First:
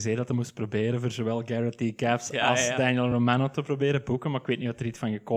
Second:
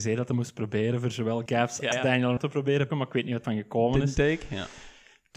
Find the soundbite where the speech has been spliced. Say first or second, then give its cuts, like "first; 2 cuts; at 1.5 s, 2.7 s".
second; 5 cuts; at 1.5 s, 1.9 s, 2.4 s, 2.9 s, 3.4 s